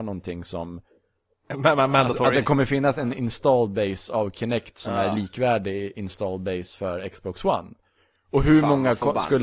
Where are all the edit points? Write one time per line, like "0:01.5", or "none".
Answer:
none